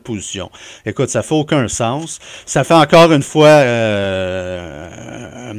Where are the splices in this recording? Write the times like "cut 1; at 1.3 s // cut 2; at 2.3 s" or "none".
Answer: none